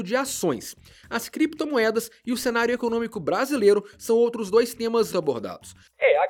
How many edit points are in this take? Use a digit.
1